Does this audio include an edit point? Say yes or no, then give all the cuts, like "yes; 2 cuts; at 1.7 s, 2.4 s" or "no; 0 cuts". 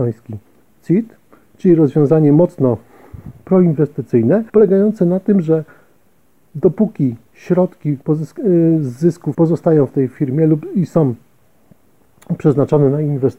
yes; 3 cuts; at 4.5 s, 8.0 s, 9.3 s